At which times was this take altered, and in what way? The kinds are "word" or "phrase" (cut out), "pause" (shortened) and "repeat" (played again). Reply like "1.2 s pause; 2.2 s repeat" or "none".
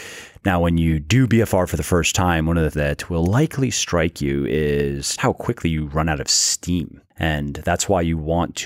2.7 s word; 5.2 s word